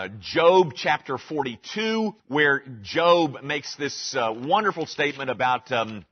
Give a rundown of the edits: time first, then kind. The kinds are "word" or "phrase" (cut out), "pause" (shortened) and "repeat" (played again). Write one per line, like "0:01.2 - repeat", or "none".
0:02.2 - pause